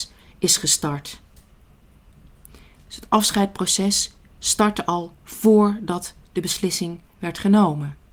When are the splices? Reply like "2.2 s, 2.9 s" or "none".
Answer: none